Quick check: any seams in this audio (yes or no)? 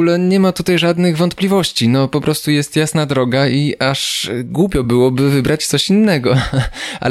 no